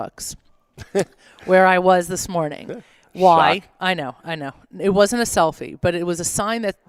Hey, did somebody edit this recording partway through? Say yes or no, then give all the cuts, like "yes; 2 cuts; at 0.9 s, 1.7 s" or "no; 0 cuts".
no; 0 cuts